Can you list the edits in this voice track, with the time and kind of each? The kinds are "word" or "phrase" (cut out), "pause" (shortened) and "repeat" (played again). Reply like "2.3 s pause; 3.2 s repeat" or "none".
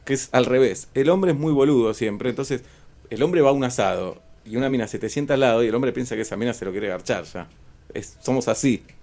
none